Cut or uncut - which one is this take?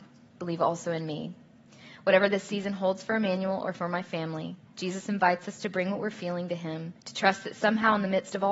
cut